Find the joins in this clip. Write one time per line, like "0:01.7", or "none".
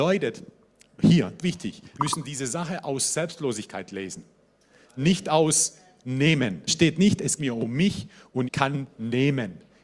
0:01.4
0:02.0
0:06.7
0:07.4
0:08.4
0:08.9